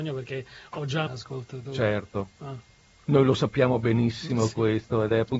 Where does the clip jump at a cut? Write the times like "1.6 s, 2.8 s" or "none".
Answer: 1.1 s

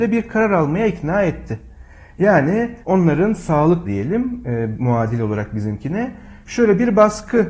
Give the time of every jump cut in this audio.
2.8 s, 3.8 s

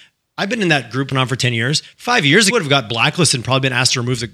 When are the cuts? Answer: 1.1 s, 2.5 s

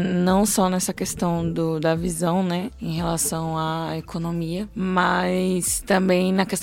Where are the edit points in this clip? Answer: none

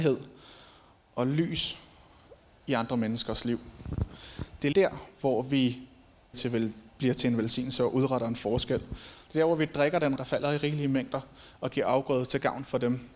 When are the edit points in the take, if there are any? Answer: 4.7 s, 6.3 s, 10.2 s

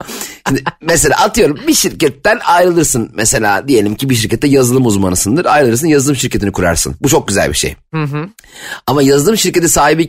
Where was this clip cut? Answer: none

